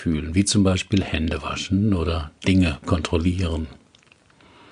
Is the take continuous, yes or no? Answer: yes